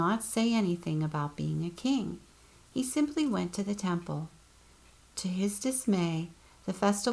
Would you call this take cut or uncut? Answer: uncut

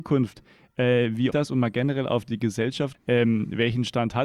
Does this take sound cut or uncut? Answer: cut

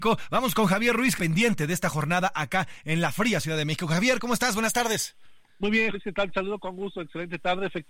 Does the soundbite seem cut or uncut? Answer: cut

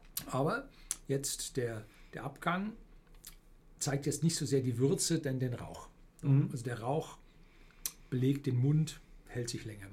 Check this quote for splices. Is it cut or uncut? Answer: uncut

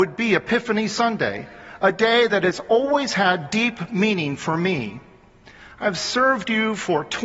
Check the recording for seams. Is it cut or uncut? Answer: uncut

